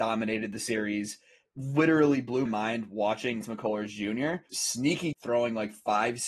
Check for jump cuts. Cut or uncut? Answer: cut